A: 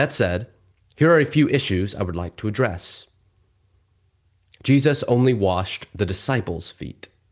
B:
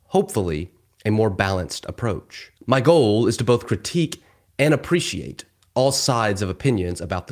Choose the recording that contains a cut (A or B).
B